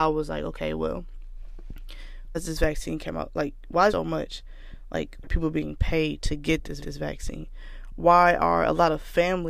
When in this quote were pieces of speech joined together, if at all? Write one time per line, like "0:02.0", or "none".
0:02.3
0:03.9
0:05.2
0:06.8